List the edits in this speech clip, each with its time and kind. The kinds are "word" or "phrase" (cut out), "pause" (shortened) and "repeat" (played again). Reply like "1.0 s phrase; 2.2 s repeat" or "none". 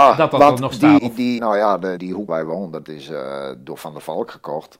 1.0 s word; 1.4 s word; 2.0 s word; 2.3 s word; 2.8 s word